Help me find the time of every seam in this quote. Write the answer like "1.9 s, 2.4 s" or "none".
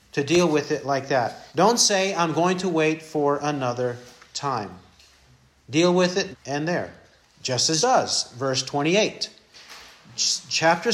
1.5 s, 6.3 s, 7.2 s, 7.8 s

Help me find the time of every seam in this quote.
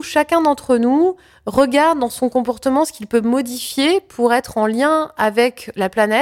none

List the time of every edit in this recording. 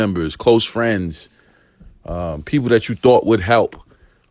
none

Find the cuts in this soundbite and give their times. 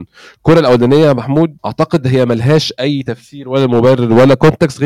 1.6 s

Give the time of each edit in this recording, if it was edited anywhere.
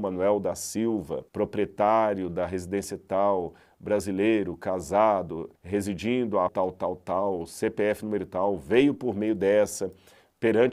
1.3 s, 5.5 s, 6.5 s

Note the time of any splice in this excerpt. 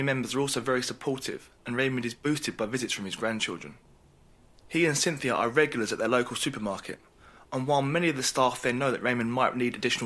none

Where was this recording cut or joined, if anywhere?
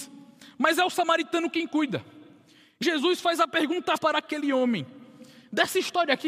2.8 s, 4.0 s

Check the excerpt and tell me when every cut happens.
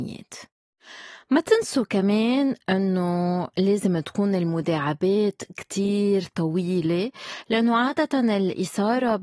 none

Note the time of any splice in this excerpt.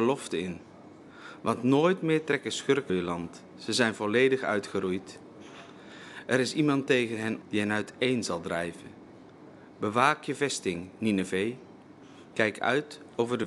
2.9 s, 7.4 s

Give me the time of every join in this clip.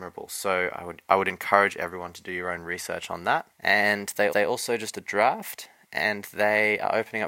3.5 s, 4.3 s, 4.9 s

